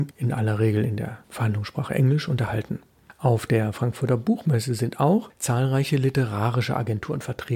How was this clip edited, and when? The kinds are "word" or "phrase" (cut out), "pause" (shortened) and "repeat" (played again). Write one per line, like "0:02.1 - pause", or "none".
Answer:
none